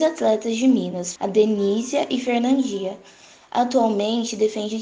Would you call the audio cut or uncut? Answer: cut